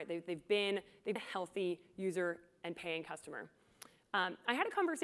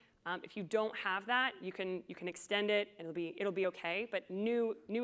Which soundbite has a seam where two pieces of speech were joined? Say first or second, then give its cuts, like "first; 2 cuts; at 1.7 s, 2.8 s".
first; 1 cut; at 1.2 s